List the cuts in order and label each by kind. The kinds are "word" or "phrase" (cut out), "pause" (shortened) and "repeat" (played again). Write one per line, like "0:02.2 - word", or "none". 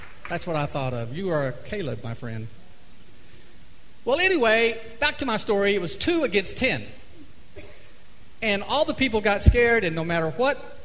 none